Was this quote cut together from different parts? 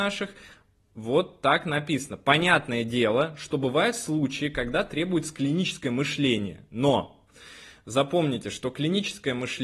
no; 0 cuts

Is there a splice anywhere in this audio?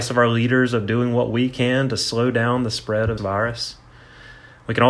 yes; 1 cut; at 3.2 s

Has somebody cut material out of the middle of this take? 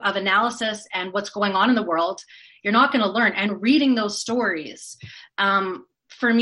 no; 0 cuts

